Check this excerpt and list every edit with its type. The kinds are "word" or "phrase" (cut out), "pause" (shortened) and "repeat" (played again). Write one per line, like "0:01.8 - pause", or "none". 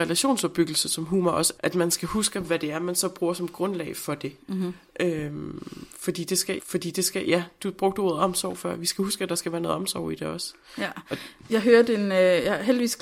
0:01.6 - word
0:02.4 - phrase
0:06.6 - repeat